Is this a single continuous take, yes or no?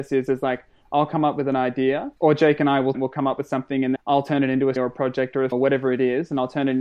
no